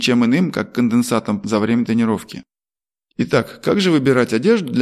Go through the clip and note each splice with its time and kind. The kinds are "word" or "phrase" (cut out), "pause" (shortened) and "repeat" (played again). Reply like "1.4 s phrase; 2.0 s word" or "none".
1.4 s word; 2.7 s pause